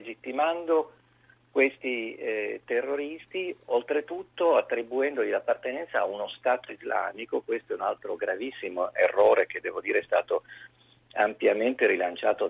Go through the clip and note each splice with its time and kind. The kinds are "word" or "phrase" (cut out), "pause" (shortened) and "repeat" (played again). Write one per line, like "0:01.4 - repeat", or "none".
none